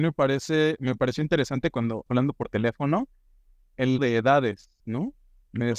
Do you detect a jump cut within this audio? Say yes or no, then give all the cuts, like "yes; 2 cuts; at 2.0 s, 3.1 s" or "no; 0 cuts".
yes; 3 cuts; at 2.1 s, 4.0 s, 4.8 s